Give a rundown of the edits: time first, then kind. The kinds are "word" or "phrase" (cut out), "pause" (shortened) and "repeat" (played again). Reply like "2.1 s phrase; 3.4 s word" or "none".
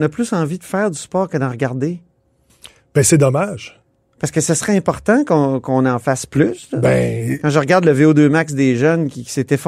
none